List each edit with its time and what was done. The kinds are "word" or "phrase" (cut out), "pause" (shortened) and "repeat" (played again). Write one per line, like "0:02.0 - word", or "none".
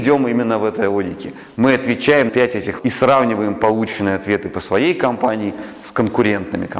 0:02.3 - word
0:02.8 - word